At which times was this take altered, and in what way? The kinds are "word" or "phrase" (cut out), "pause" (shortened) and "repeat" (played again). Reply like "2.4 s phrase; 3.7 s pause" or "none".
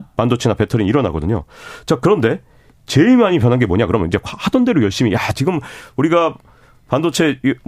none